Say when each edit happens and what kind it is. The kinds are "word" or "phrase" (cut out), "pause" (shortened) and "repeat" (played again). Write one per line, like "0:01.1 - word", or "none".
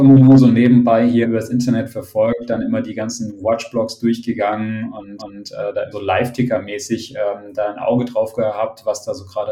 0:01.2 - word
0:05.2 - repeat
0:05.9 - phrase